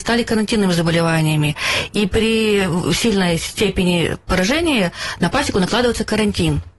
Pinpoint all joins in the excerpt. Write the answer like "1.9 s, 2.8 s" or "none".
none